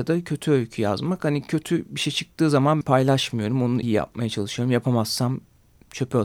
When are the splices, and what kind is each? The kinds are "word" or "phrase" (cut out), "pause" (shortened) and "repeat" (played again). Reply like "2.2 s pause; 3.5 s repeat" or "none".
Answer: 2.8 s phrase; 3.8 s word